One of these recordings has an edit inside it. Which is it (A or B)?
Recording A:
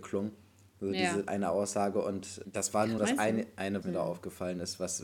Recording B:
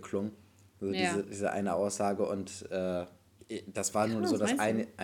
A